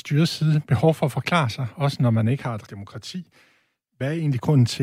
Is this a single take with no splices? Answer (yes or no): no